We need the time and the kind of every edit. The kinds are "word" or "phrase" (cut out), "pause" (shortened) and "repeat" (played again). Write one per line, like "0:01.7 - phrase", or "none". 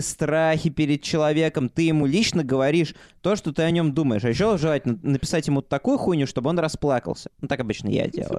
none